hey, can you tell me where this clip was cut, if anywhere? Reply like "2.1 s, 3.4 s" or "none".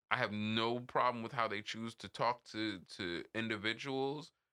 2.9 s